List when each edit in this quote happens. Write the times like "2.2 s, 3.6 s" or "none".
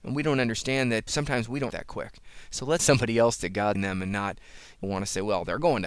1.1 s, 1.7 s, 2.8 s, 3.4 s, 3.7 s, 4.8 s